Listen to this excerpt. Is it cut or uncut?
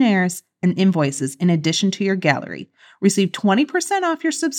uncut